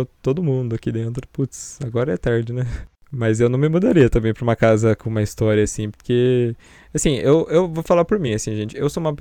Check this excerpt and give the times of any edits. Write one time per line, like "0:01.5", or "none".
none